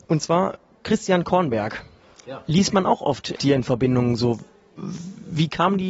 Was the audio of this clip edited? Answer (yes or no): yes